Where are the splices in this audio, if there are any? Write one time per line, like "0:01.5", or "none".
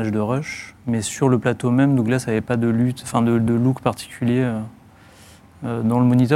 none